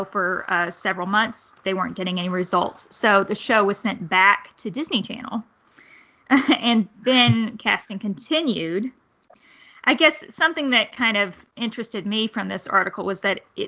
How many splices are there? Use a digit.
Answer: 0